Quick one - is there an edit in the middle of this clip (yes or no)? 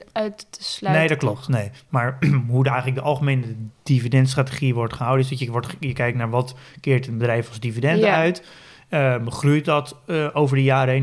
no